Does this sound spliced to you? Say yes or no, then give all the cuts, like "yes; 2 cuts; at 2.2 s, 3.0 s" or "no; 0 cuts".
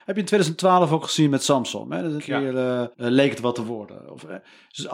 yes; 2 cuts; at 2.2 s, 2.9 s